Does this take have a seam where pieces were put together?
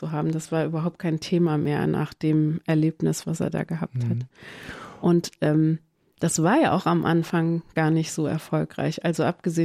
no; 0 cuts

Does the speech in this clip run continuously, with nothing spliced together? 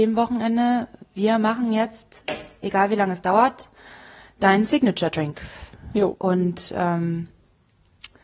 yes; 0 cuts

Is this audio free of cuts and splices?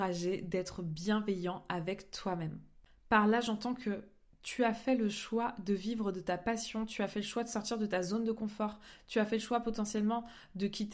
yes; 0 cuts

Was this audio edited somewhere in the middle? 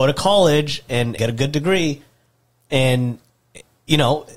yes; 1 cut; at 1.2 s

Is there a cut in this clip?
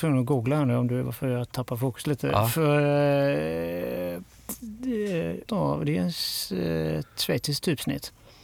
yes; 1 cut; at 5.5 s

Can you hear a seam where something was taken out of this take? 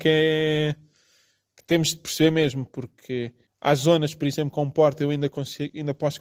yes; 1 cut; at 3.5 s

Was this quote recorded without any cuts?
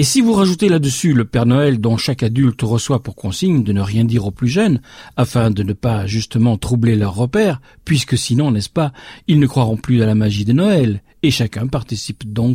yes; 0 cuts

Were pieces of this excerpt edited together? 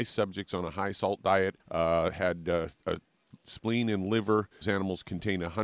yes; 2 cuts; at 1.6 s, 4.6 s

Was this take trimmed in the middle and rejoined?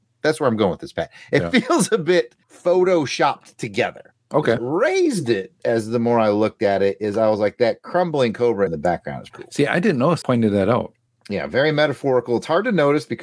yes; 4 cuts; at 4.6 s, 8.7 s, 9.3 s, 10.2 s

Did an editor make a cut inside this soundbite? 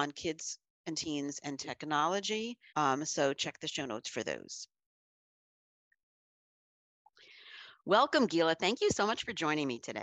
yes; 1 cut; at 2.7 s

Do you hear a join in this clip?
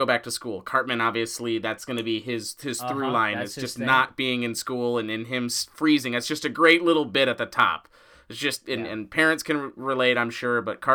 no; 0 cuts

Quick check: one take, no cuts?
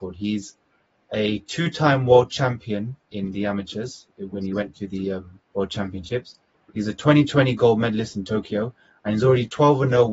no; 1 cut; at 5.5 s

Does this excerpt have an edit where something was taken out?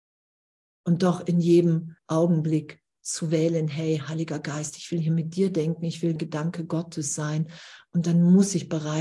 yes; 2 cuts; at 2.0 s, 6.2 s

